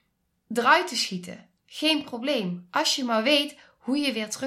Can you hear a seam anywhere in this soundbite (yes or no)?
yes